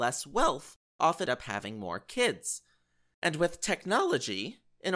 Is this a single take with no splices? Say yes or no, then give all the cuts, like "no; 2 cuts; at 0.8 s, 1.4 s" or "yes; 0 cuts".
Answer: no; 1 cut; at 1.3 s